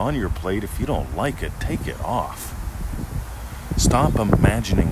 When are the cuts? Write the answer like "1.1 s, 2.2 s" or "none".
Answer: none